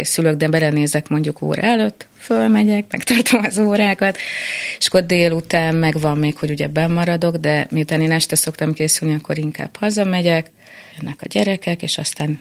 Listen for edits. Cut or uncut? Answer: cut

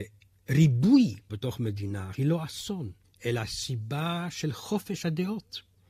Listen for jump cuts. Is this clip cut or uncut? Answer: cut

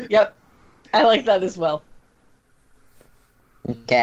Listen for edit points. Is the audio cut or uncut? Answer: uncut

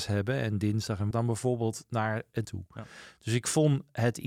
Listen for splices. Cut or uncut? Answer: cut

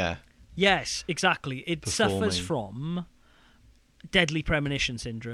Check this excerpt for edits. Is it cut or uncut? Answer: uncut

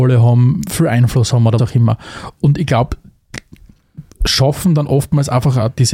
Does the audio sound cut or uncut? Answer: cut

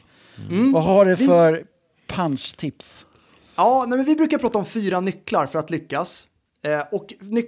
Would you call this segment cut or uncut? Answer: uncut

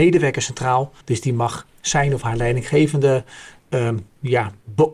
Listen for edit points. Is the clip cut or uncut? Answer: cut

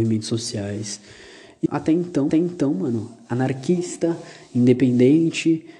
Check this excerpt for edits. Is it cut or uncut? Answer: cut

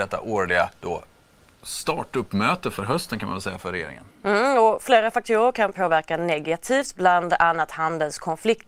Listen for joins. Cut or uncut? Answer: uncut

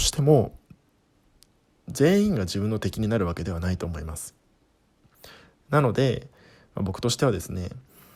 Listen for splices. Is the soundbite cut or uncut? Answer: uncut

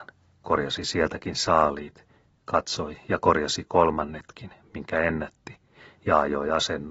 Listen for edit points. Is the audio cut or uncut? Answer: uncut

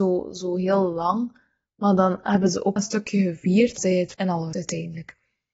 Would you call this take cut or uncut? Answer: cut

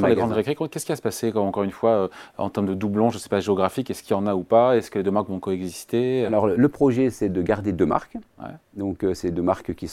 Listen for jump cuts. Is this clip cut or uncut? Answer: uncut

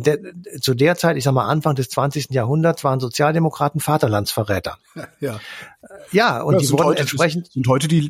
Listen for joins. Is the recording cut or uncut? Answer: uncut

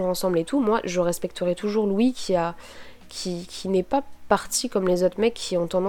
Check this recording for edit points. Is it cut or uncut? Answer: uncut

